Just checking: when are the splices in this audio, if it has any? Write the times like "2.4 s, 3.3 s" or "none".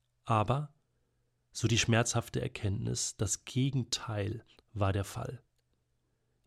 4.6 s